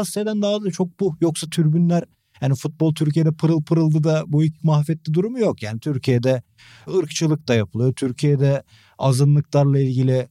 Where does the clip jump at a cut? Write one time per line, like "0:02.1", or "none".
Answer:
0:04.6